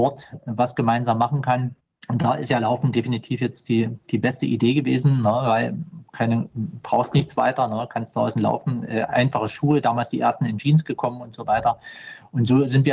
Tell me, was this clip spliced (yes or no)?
yes